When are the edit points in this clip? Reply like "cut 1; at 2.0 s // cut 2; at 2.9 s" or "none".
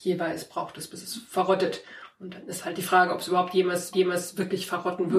cut 1; at 3.9 s